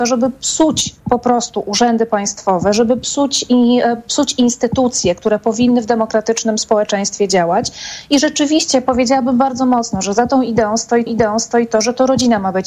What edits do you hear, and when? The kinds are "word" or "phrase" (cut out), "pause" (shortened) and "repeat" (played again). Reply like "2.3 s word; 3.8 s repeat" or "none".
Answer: 11.1 s repeat